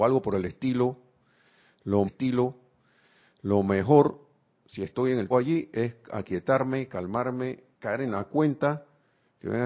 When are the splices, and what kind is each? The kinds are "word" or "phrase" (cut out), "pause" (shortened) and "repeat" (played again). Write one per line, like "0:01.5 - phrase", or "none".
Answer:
0:02.1 - repeat
0:05.3 - word
0:07.7 - pause